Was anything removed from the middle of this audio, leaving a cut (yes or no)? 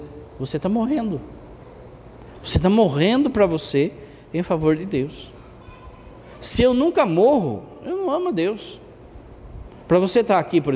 no